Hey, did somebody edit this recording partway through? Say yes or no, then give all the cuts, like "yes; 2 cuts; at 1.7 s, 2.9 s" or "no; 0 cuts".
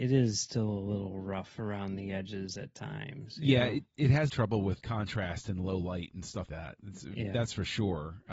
yes; 3 cuts; at 4.3 s, 4.8 s, 6.5 s